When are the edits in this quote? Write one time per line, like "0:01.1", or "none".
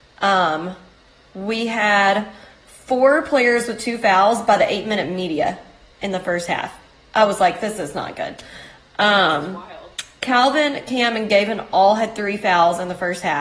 none